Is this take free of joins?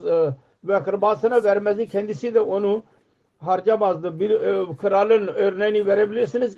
yes; 0 cuts

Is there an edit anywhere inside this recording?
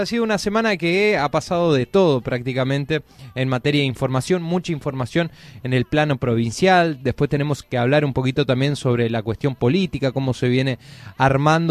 no; 0 cuts

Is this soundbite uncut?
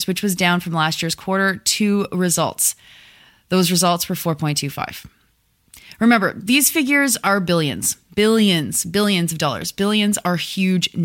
yes; 0 cuts

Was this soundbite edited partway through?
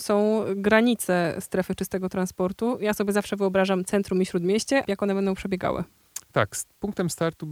yes; 1 cut; at 4.8 s

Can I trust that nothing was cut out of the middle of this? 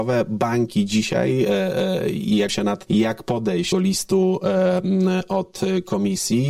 no; 3 cuts; at 2.5 s, 2.9 s, 3.7 s

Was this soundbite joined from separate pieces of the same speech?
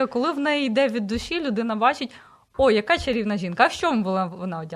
no; 0 cuts

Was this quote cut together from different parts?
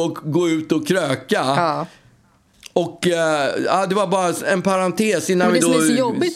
no; 0 cuts

